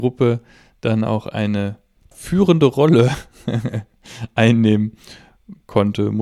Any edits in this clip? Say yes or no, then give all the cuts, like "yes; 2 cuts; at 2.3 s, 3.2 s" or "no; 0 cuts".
yes; 1 cut; at 2.1 s